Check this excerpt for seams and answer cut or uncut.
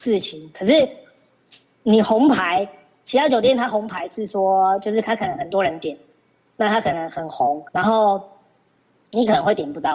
cut